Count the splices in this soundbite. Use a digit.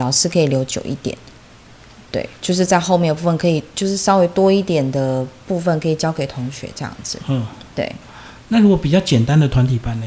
1